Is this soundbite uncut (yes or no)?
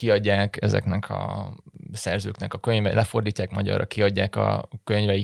yes